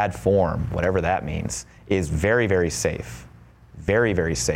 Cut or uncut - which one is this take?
uncut